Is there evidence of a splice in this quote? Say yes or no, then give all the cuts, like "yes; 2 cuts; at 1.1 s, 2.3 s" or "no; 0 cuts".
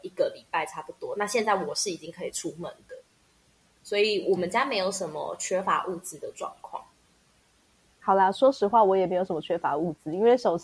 no; 0 cuts